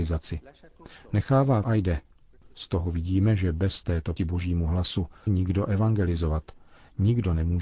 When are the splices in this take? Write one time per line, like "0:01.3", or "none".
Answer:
0:01.6
0:04.2
0:05.3